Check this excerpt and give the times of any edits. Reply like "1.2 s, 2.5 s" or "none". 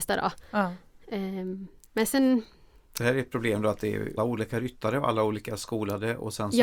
4.2 s